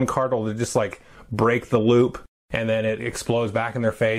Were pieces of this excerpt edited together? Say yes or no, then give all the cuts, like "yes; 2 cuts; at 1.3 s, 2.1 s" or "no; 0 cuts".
no; 0 cuts